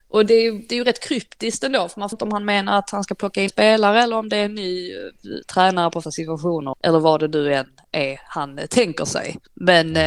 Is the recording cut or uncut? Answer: cut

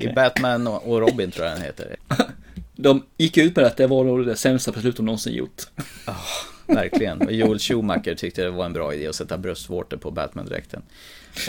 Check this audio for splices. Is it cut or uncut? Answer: uncut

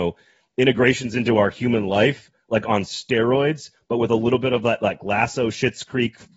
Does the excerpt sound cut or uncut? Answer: uncut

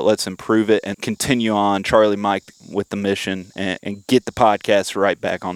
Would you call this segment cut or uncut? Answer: cut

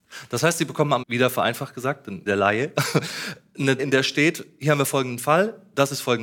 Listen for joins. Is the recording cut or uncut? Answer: cut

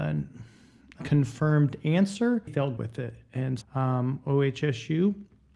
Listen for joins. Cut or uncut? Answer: cut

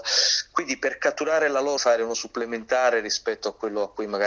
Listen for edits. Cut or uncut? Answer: cut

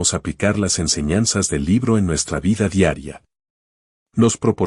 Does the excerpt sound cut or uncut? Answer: uncut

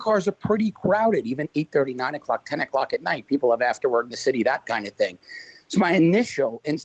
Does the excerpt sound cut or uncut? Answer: cut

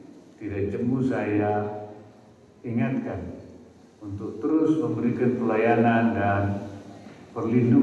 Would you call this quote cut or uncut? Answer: uncut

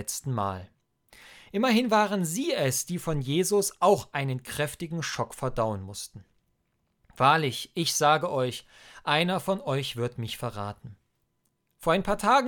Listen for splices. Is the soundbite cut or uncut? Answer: uncut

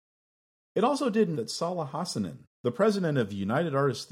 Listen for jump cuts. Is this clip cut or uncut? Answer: cut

